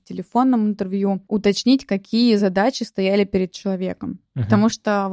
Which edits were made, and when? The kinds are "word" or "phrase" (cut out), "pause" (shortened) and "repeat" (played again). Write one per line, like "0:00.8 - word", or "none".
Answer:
none

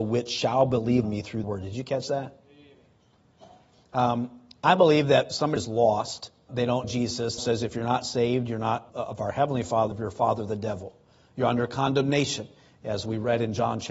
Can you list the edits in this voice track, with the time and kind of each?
0:01.0 - word
0:01.4 - word
0:05.6 - word
0:06.5 - word
0:06.8 - word
0:07.4 - word
0:08.9 - word
0:09.9 - word

